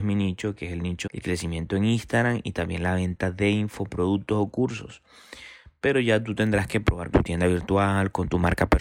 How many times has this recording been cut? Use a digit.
2